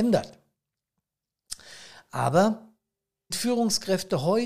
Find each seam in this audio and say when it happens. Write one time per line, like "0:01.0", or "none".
0:03.3